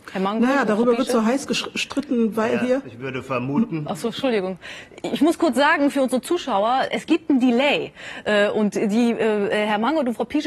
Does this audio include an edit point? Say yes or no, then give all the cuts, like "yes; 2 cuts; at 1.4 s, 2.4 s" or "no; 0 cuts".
yes; 1 cut; at 6.9 s